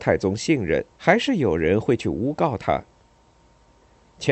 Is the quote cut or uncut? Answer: cut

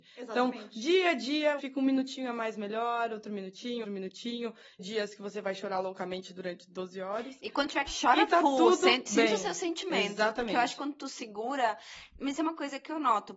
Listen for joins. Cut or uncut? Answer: cut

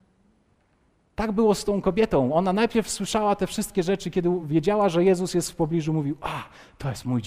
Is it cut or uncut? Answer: uncut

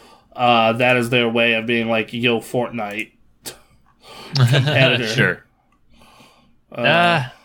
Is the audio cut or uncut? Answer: uncut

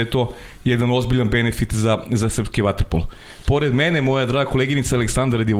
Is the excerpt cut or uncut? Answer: uncut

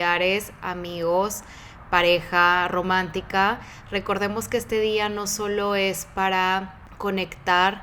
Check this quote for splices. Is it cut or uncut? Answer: uncut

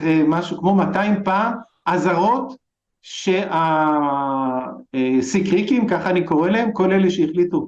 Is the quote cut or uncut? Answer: uncut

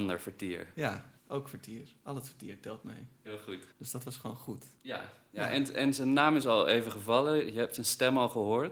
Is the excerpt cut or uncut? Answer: cut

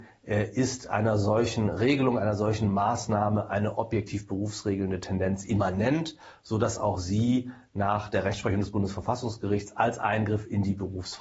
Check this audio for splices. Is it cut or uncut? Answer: uncut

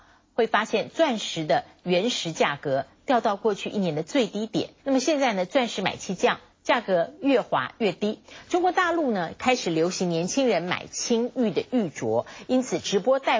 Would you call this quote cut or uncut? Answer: cut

